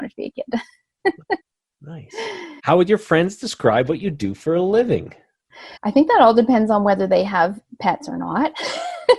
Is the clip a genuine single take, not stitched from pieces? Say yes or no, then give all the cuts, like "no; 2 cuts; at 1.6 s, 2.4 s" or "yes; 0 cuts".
no; 3 cuts; at 1.4 s, 2.6 s, 5.8 s